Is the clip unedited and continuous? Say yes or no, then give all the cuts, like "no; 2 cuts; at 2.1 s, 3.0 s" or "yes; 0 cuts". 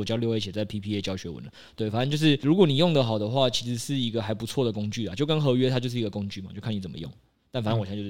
yes; 0 cuts